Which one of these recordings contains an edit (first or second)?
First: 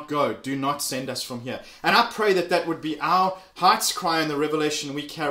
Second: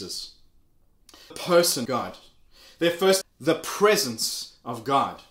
second